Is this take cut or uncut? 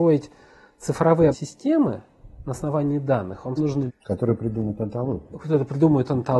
cut